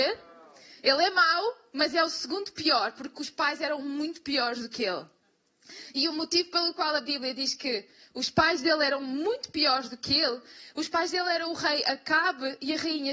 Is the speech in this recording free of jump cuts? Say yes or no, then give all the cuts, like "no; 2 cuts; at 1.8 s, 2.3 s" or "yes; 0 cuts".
yes; 0 cuts